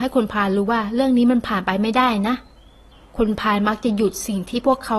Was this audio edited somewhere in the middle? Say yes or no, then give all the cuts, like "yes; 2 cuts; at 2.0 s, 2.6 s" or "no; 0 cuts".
yes; 1 cut; at 2.9 s